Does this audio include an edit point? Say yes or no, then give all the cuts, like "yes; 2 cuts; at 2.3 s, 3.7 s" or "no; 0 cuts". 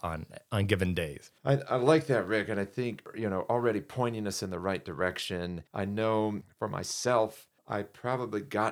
yes; 3 cuts; at 1.4 s, 5.7 s, 7.6 s